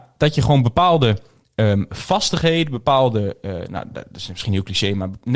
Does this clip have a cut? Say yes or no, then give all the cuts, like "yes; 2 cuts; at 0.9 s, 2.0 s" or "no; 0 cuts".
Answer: no; 0 cuts